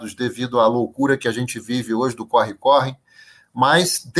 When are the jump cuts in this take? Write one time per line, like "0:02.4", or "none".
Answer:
none